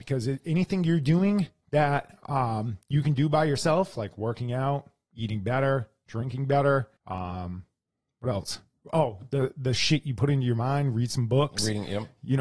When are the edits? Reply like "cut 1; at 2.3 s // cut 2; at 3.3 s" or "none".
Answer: cut 1; at 7.0 s